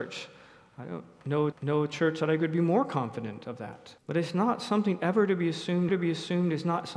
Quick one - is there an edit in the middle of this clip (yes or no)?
yes